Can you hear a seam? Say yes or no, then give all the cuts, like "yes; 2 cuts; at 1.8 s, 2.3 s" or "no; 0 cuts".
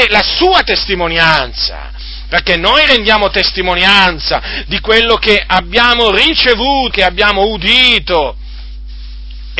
yes; 1 cut; at 6.9 s